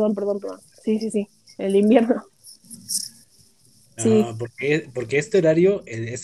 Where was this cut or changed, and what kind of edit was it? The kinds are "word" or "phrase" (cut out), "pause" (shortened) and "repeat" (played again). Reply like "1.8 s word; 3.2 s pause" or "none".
none